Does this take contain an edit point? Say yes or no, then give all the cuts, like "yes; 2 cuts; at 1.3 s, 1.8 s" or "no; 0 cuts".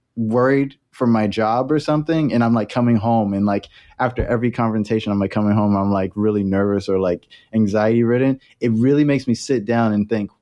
no; 0 cuts